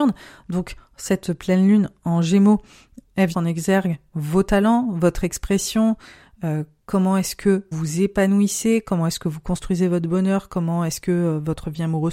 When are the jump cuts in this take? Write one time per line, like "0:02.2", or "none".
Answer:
0:03.3
0:07.7